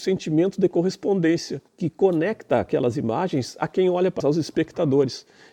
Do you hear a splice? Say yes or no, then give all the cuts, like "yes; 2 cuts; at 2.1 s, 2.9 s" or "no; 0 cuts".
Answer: yes; 2 cuts; at 1.7 s, 4.2 s